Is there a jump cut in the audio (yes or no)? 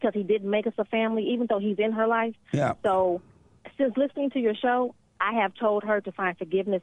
no